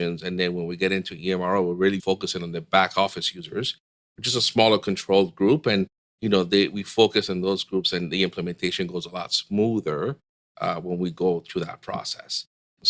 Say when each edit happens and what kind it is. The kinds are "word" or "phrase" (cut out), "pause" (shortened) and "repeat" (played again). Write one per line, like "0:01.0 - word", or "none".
0:02.0 - word